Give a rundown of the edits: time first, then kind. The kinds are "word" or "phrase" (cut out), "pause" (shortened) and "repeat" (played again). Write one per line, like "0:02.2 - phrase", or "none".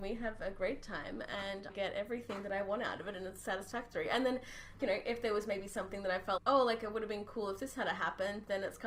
0:01.7 - word
0:04.8 - word
0:06.4 - word